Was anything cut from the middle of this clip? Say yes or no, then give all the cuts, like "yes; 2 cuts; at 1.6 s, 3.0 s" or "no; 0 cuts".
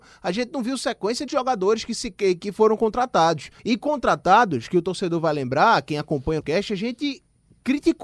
yes; 3 cuts; at 1.3 s, 3.6 s, 6.4 s